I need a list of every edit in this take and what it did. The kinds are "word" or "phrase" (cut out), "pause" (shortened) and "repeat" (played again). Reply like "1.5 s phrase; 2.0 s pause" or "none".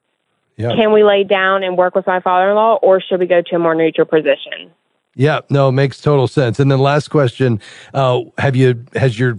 none